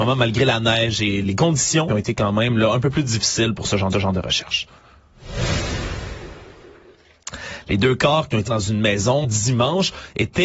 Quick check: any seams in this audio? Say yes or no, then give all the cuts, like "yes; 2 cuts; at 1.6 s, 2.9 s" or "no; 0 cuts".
yes; 5 cuts; at 1.2 s, 1.9 s, 3.9 s, 8.5 s, 9.2 s